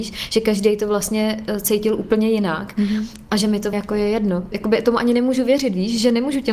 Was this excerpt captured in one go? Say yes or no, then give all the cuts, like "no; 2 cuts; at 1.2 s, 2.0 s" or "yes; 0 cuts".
no; 2 cuts; at 3.7 s, 4.5 s